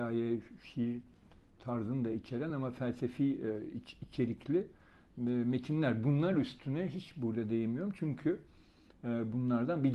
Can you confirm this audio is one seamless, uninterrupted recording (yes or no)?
yes